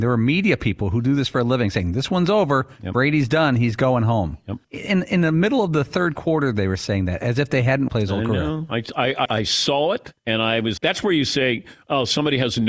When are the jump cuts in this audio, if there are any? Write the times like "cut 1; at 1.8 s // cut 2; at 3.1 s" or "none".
cut 1; at 4.6 s // cut 2; at 7.9 s // cut 3; at 9.3 s // cut 4; at 10.2 s // cut 5; at 10.8 s